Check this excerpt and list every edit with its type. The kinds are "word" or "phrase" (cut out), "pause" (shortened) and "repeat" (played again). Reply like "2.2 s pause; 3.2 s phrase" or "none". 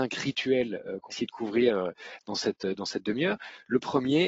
1.1 s word